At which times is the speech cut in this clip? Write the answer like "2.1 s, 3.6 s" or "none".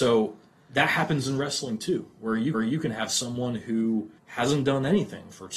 2.5 s, 4.2 s